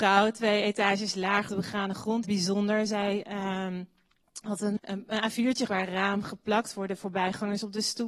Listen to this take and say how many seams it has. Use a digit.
4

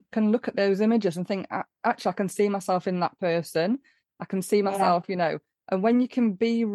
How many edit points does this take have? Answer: 0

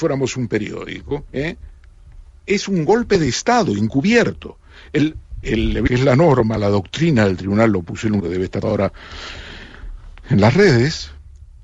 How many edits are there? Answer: 5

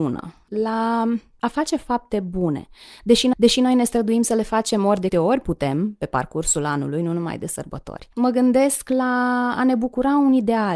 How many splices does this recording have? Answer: 3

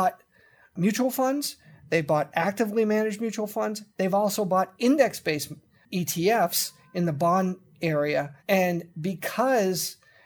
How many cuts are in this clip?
1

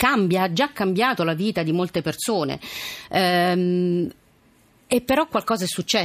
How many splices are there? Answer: 0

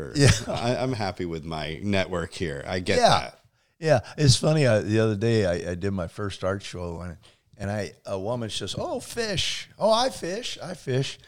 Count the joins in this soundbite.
0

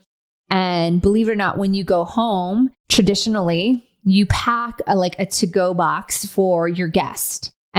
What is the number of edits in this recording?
1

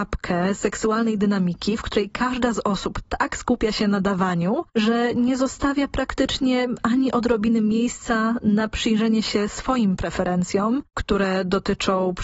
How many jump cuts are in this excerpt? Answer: 2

